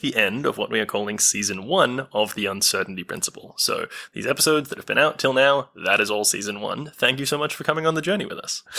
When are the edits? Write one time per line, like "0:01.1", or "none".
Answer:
none